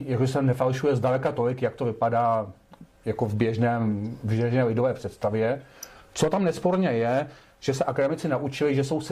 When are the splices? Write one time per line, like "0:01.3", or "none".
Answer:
none